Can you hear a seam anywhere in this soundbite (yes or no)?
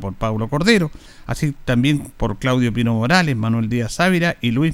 no